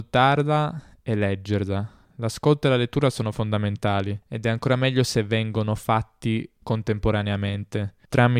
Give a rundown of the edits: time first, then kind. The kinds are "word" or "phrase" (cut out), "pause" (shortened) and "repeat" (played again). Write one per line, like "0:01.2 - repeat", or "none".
0:04.2 - pause

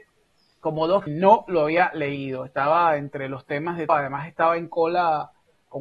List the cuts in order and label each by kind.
0:01.1 - phrase
0:03.9 - word

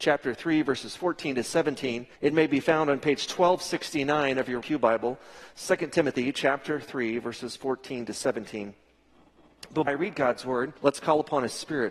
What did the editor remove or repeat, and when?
0:02.1 - pause
0:04.6 - word
0:09.9 - word
0:10.8 - pause

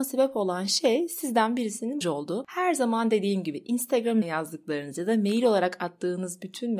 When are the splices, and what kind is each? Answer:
0:02.0 - phrase
0:04.2 - word

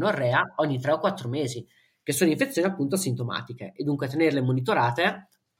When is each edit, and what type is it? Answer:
none

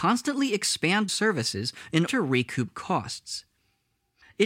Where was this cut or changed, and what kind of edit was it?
0:01.1 - word
0:02.1 - word

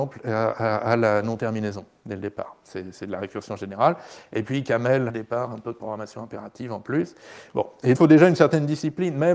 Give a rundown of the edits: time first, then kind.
0:05.1 - phrase
0:07.9 - word

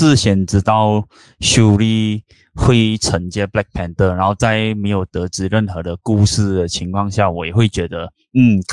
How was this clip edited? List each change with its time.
none

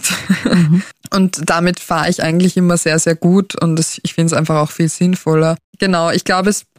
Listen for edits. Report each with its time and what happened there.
0:05.7 - pause

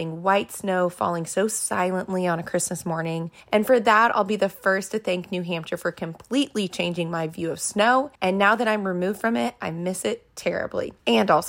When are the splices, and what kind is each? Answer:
0:03.4 - pause
0:08.2 - pause

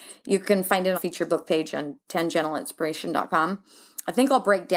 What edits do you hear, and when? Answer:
0:00.9 - word

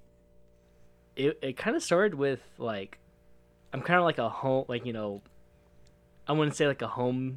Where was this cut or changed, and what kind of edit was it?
none

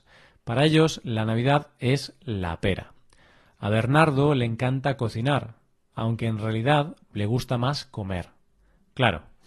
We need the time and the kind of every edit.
none

